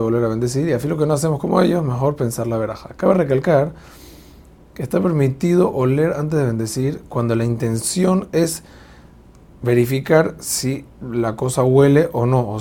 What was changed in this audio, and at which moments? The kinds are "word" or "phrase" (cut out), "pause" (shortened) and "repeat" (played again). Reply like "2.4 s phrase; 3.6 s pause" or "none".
none